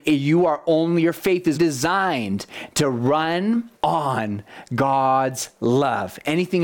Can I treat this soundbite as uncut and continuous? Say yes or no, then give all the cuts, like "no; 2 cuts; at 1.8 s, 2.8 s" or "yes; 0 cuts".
no; 2 cuts; at 1.5 s, 3.7 s